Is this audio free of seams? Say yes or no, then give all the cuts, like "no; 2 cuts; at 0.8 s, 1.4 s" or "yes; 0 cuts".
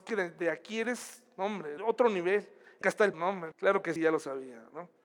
no; 5 cuts; at 1.8 s, 2.8 s, 3.1 s, 3.5 s, 4.0 s